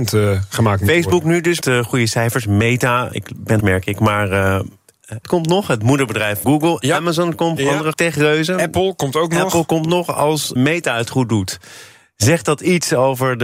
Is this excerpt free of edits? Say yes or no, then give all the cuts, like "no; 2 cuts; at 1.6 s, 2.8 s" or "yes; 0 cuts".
no; 7 cuts; at 1.6 s, 3.6 s, 5.2 s, 6.4 s, 7.6 s, 7.9 s, 10.6 s